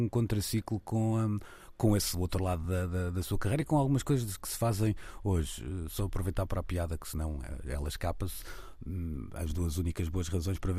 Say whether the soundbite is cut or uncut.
uncut